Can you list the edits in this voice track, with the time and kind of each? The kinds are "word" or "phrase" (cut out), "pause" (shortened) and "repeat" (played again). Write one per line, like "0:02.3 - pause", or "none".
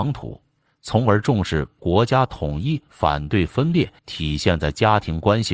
0:04.0 - pause